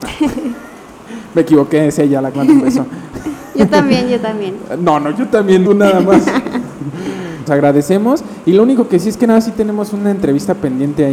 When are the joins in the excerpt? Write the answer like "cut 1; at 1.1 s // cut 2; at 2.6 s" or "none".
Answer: cut 1; at 2.3 s // cut 2; at 5.7 s // cut 3; at 7.5 s

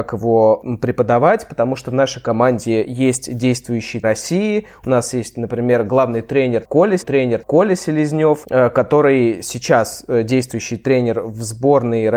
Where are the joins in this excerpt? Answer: cut 1; at 4.0 s // cut 2; at 7.0 s

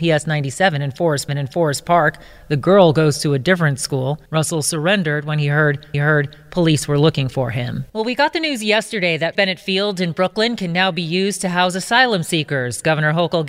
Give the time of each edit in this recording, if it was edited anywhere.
cut 1; at 1.3 s // cut 2; at 4.3 s // cut 3; at 5.9 s // cut 4; at 7.9 s // cut 5; at 9.4 s

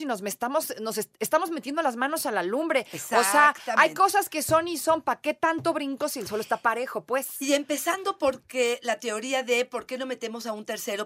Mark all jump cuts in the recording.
none

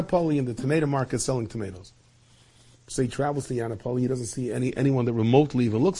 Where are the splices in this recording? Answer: none

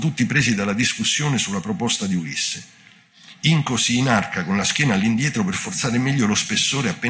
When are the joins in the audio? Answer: none

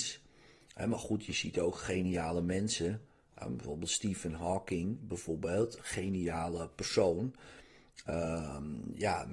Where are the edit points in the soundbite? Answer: none

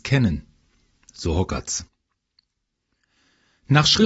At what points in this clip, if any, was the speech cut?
none

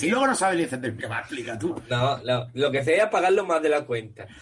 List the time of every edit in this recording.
cut 1; at 1.0 s

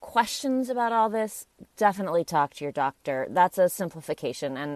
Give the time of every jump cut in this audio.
none

